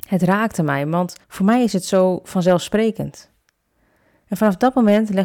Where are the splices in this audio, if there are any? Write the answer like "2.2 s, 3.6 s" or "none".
1.2 s